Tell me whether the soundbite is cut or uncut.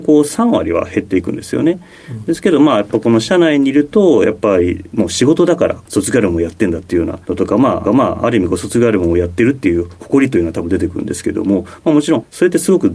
cut